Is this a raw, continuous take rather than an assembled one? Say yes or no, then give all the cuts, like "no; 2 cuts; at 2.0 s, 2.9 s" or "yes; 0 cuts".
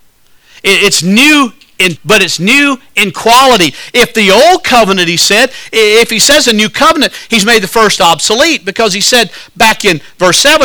no; 1 cut; at 2.0 s